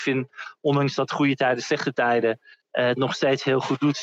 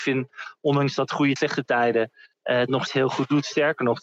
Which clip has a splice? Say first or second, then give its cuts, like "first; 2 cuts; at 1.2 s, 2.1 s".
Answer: second; 2 cuts; at 1.4 s, 2.9 s